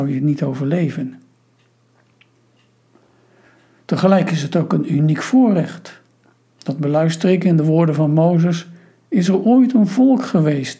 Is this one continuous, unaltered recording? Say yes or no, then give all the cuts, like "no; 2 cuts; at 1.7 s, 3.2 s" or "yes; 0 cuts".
yes; 0 cuts